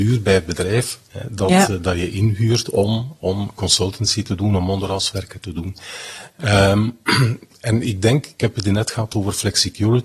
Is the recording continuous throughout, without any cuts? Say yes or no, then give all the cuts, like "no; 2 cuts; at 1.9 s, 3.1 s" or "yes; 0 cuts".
yes; 0 cuts